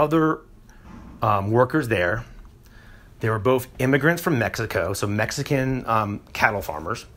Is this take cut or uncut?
uncut